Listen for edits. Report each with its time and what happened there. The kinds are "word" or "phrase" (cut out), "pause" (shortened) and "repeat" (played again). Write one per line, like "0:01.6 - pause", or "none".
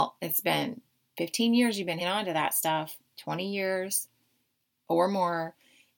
0:02.0 - word